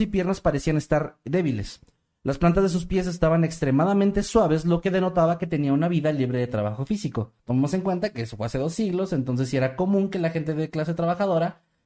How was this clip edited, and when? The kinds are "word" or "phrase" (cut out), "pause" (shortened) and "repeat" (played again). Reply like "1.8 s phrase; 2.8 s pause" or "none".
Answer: 7.4 s pause